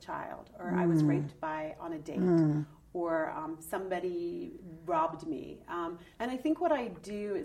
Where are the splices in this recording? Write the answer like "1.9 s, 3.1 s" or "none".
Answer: 6.1 s